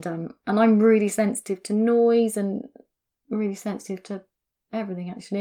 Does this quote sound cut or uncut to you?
uncut